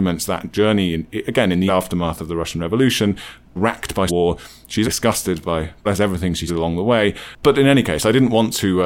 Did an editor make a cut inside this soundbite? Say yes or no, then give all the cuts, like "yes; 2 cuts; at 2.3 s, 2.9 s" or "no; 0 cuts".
yes; 6 cuts; at 1.7 s, 3.6 s, 4.1 s, 4.8 s, 5.9 s, 6.5 s